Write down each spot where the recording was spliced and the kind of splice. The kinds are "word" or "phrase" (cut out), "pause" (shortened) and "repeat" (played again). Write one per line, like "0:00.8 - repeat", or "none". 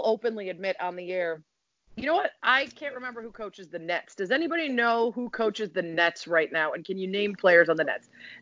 0:07.4 - word